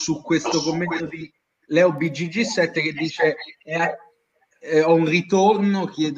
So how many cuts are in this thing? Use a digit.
0